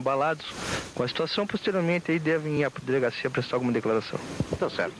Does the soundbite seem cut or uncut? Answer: uncut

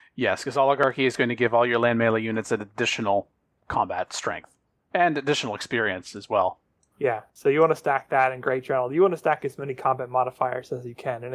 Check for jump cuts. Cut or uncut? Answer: uncut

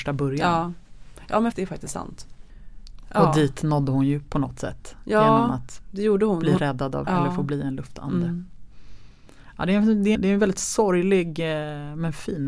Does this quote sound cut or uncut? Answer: cut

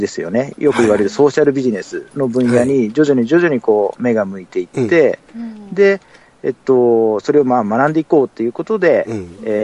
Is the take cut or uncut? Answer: uncut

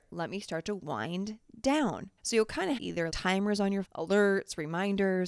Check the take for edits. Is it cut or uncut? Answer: cut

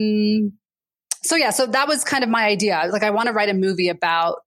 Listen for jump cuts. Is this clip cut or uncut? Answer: uncut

